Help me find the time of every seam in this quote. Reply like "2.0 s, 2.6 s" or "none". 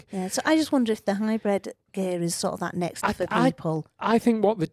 3.0 s